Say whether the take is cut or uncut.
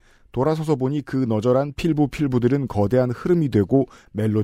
uncut